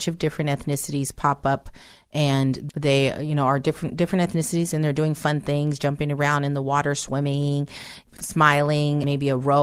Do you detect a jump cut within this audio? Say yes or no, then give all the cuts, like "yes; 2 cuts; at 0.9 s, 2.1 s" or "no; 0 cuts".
no; 0 cuts